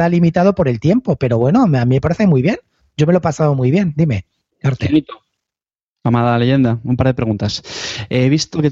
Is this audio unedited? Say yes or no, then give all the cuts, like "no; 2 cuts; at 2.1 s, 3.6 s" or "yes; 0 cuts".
yes; 0 cuts